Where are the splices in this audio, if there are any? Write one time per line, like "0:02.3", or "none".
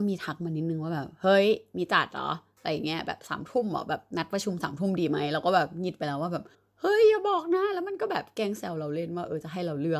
0:06.5